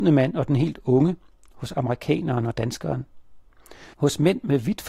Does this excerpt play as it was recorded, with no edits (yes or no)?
yes